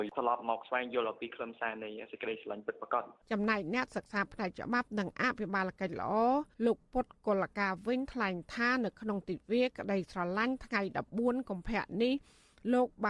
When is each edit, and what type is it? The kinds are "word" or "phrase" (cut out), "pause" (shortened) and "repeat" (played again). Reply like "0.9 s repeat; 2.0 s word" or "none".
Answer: 3.2 s pause; 6.5 s pause